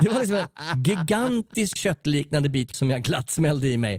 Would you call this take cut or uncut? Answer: cut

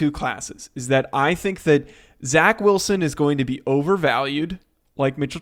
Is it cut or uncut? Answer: uncut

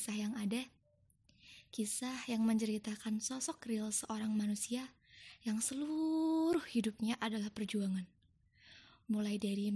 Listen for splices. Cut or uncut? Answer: uncut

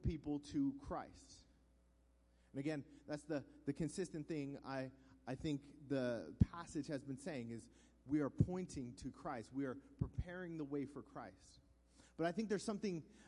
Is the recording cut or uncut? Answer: uncut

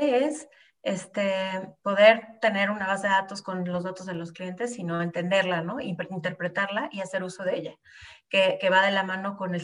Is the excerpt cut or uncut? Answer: uncut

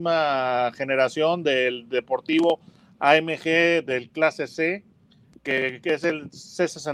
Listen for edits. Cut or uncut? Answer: uncut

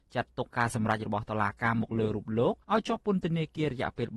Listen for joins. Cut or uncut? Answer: cut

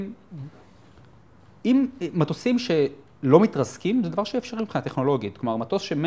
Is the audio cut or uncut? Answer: uncut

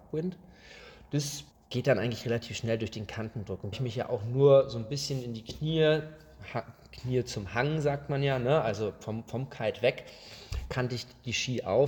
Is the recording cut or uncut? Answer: cut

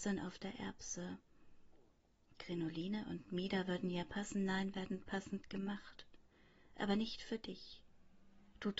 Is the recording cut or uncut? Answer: uncut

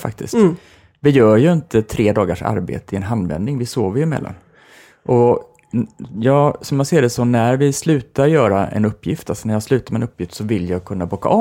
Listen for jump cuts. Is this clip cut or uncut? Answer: uncut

